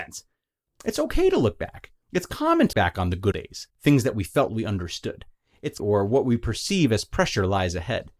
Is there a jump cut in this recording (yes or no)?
yes